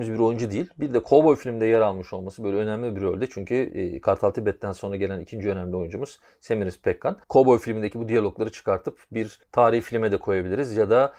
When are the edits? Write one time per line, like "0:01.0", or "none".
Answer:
0:07.2
0:09.4